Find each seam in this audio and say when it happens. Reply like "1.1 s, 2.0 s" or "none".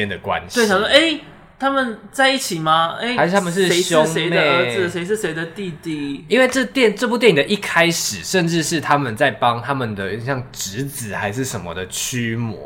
none